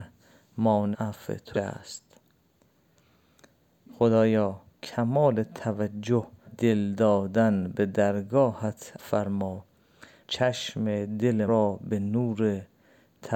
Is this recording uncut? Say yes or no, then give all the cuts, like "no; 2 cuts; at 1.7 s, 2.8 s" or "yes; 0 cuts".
no; 7 cuts; at 0.9 s, 1.5 s, 4.8 s, 6.5 s, 9.0 s, 10.2 s, 11.5 s